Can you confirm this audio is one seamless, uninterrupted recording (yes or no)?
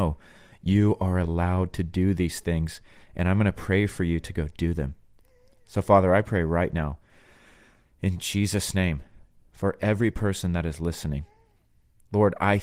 yes